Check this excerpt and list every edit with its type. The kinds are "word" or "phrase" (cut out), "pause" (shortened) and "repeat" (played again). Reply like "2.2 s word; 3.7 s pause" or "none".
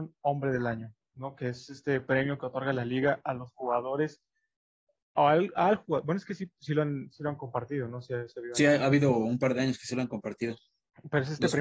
none

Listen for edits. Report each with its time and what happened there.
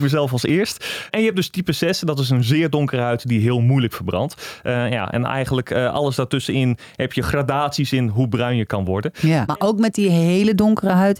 none

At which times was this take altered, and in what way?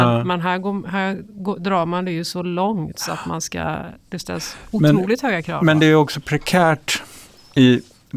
none

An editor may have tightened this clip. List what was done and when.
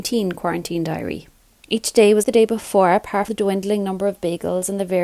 2.2 s word; 3.3 s word

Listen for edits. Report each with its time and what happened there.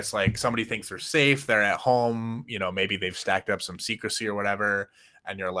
none

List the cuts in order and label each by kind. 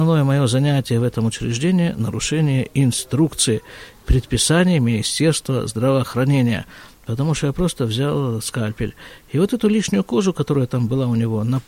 none

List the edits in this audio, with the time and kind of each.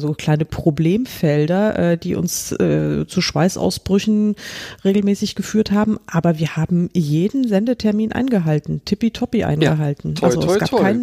none

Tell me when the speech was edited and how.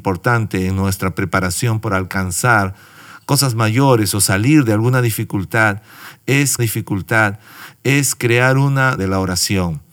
6.6 s repeat; 9.0 s word

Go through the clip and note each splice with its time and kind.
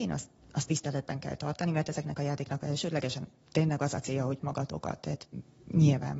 4.4 s phrase

